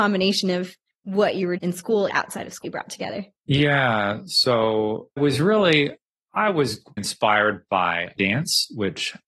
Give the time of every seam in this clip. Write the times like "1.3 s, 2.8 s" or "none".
1.6 s, 2.1 s, 2.6 s, 5.2 s, 7.0 s, 8.2 s